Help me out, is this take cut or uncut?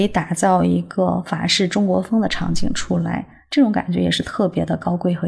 uncut